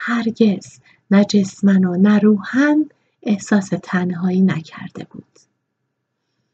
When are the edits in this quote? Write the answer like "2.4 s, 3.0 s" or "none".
none